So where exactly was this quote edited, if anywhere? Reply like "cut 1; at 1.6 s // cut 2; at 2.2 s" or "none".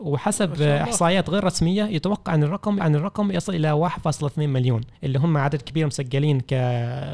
cut 1; at 2.8 s // cut 2; at 5.0 s